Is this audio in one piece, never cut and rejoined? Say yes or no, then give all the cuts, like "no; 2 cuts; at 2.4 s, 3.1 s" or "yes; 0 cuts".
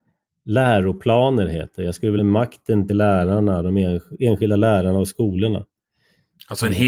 no; 2 cuts; at 2.2 s, 2.9 s